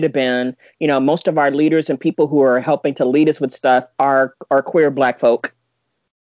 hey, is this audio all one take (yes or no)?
yes